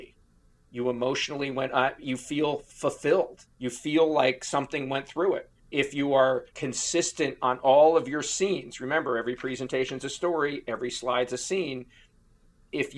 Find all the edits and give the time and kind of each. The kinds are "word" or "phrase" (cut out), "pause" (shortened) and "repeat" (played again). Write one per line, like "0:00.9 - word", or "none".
0:03.5 - pause
0:05.6 - pause
0:06.5 - pause